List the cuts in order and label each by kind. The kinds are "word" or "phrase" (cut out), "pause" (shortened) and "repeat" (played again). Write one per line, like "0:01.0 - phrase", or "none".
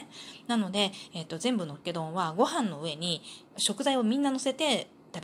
0:03.5 - pause